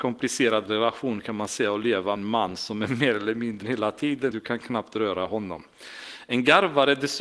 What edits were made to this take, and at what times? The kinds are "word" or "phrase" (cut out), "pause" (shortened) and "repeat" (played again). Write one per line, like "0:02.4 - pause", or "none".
0:02.2 - word
0:03.6 - word
0:04.3 - word